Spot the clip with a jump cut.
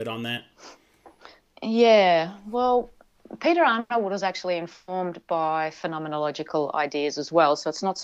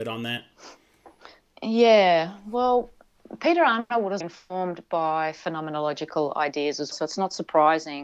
second; 2 cuts; at 4.2 s, 6.9 s

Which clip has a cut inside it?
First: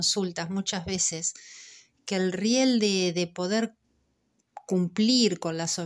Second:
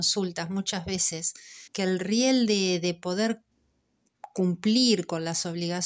second; 1 cut; at 1.7 s

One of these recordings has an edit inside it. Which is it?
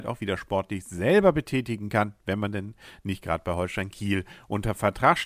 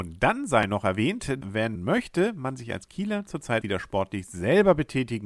second; 3 cuts; at 1.4 s, 1.8 s, 3.6 s

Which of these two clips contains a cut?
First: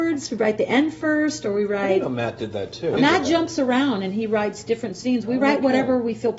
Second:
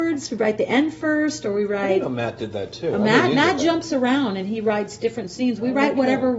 first; 1 cut; at 3.0 s

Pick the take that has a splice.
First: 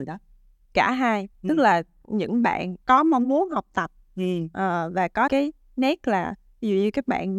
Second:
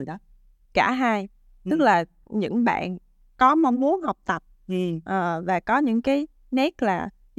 first; 3 cuts; at 1.3 s, 2.8 s, 5.3 s

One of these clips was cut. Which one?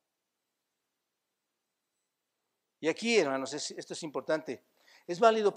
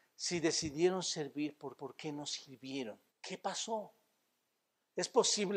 second; 2 cuts; at 1.8 s, 3.1 s

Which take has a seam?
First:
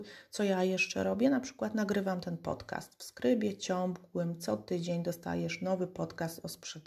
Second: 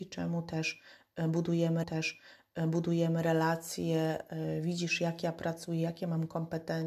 second; 1 cut; at 1.8 s

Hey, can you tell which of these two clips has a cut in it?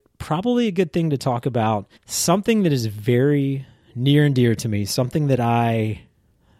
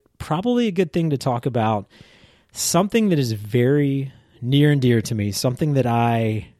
first; 1 cut; at 2.0 s

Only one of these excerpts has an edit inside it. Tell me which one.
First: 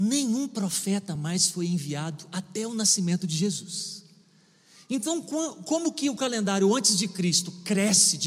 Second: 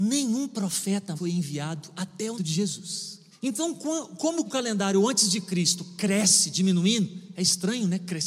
second; 4 cuts; at 1.2 s, 2.4 s, 3.3 s, 4.4 s

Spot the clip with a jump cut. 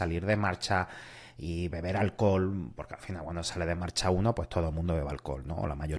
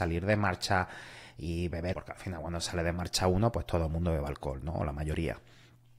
second; 1 cut; at 1.9 s

